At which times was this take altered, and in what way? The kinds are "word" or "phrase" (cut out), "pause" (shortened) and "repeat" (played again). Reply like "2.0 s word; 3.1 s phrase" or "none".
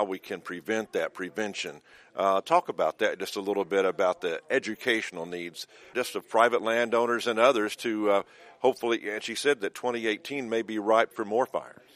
none